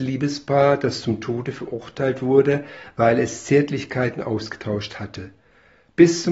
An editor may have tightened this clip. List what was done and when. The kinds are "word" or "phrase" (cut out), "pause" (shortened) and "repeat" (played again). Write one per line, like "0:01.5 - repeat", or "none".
none